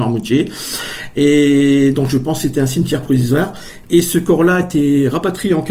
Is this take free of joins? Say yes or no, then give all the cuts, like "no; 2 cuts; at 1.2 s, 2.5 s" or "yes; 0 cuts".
yes; 0 cuts